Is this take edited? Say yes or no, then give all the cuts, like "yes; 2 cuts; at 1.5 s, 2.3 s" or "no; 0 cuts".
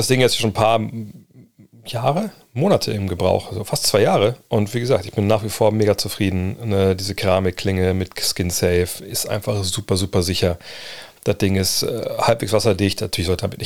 no; 0 cuts